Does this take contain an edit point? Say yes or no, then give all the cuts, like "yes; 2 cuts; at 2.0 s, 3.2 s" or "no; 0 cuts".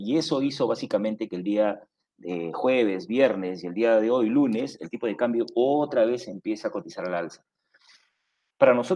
no; 0 cuts